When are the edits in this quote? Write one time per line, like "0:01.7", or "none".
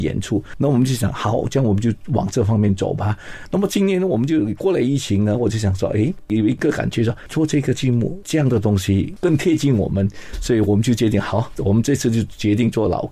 none